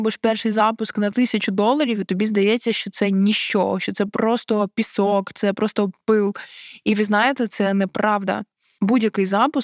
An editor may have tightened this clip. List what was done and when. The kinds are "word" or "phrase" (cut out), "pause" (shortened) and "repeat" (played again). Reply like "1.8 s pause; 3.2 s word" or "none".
none